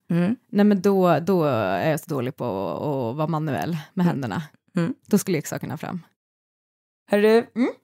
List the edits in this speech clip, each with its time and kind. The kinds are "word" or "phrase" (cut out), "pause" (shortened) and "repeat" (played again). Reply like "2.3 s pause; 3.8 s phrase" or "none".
none

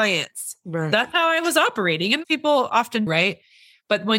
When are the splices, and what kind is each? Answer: 2.2 s word; 3.1 s word

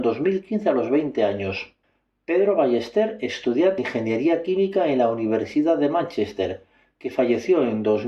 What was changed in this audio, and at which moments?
1.8 s pause; 3.8 s word

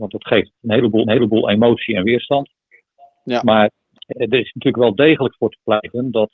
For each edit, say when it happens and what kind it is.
1.0 s repeat; 4.1 s word

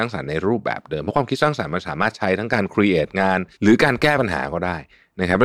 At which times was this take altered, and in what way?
3.5 s pause

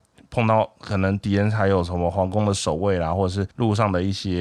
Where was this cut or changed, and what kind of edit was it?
3.5 s pause

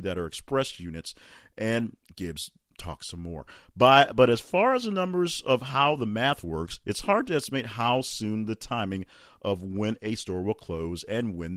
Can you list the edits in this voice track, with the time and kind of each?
none

